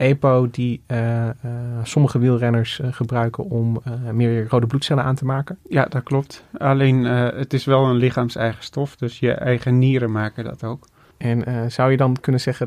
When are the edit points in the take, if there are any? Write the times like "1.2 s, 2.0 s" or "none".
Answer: 11.1 s

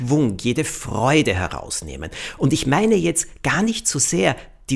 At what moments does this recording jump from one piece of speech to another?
none

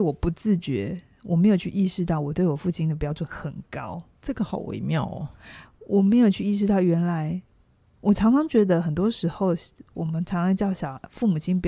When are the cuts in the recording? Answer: none

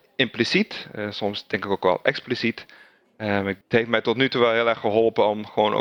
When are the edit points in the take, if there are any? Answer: 3.6 s

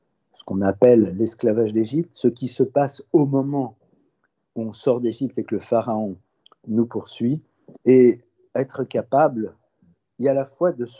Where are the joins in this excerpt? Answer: 7.8 s

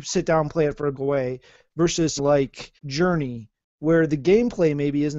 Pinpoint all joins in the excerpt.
0.9 s, 2.2 s, 2.8 s

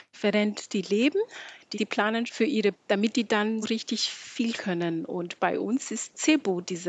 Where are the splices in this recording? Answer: 1.7 s, 2.3 s, 2.7 s, 3.6 s, 4.6 s

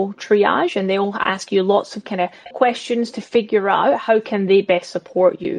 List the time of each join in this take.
2.5 s

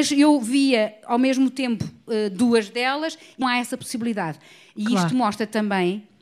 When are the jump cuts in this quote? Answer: 3.4 s

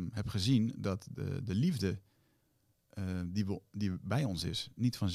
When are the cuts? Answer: none

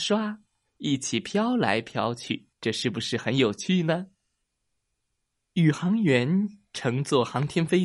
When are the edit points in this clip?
2.5 s

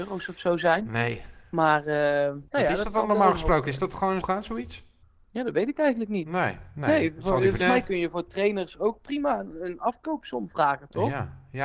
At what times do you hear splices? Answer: 2.5 s, 4.2 s, 5.0 s, 7.6 s

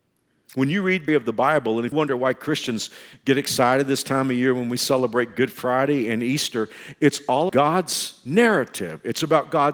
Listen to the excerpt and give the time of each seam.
1.1 s, 1.9 s, 7.5 s

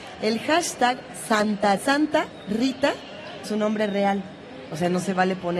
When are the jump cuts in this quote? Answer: 1.8 s, 3.4 s

